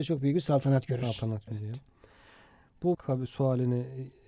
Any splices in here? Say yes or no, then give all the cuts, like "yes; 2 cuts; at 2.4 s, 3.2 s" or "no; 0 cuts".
yes; 2 cuts; at 1.5 s, 2.9 s